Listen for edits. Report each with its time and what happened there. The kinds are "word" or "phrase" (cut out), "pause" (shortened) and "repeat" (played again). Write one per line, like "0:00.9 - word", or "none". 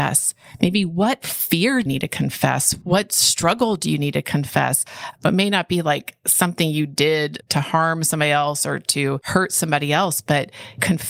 0:01.9 - word

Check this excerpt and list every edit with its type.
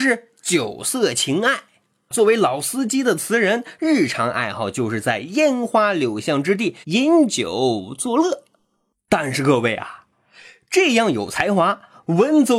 0:06.8 - pause

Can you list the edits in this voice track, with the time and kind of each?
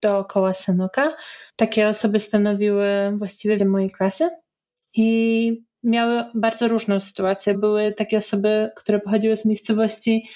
0:01.5 - pause
0:03.6 - word
0:07.5 - word

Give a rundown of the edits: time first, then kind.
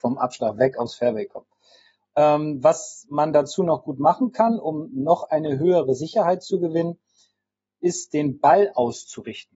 none

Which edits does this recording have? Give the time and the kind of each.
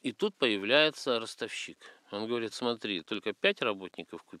0:02.0 - pause
0:02.5 - word
0:03.0 - phrase

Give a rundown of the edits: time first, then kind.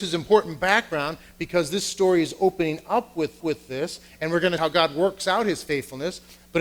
0:03.4 - repeat
0:04.6 - phrase

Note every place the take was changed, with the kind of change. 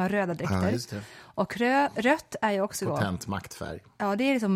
none

